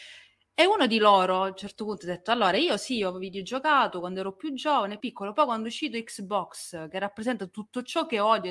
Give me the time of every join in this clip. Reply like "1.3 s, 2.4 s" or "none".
5.0 s